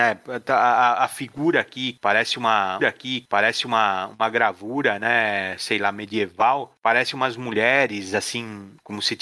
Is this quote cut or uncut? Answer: cut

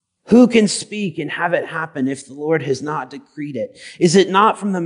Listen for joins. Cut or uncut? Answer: uncut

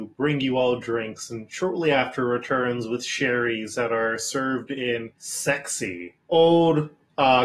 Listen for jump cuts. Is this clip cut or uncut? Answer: uncut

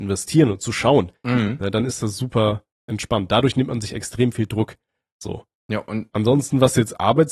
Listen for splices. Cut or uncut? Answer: uncut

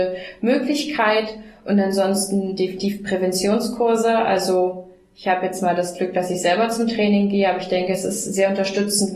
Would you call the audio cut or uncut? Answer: uncut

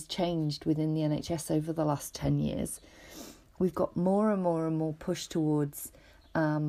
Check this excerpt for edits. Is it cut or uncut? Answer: uncut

